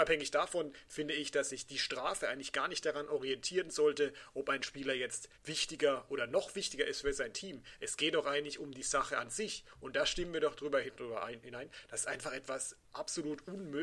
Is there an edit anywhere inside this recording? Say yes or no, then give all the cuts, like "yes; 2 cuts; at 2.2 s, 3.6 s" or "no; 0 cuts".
yes; 1 cut; at 5.3 s